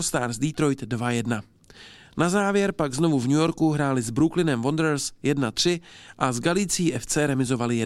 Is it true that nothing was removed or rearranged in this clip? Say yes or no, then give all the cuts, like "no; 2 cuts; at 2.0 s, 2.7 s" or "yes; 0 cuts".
yes; 0 cuts